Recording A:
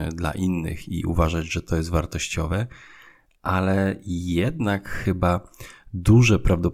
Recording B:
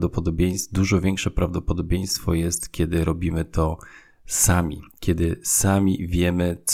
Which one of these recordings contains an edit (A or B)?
B